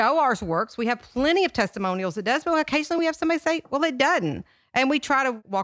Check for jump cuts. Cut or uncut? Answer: uncut